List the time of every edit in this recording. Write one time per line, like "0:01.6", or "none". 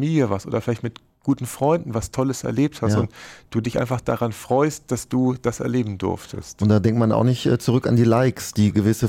none